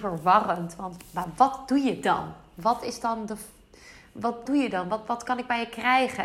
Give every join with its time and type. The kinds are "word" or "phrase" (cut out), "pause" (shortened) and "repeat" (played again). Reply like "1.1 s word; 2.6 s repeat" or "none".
4.5 s word